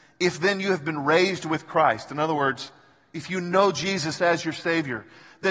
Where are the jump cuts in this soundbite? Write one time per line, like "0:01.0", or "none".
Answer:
none